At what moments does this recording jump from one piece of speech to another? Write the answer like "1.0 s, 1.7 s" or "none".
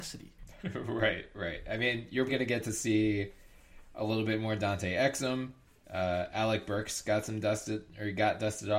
2.3 s